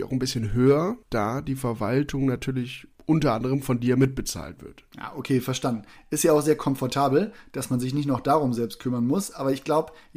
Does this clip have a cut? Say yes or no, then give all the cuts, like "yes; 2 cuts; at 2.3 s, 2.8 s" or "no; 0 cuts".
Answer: yes; 3 cuts; at 1.0 s, 2.9 s, 4.9 s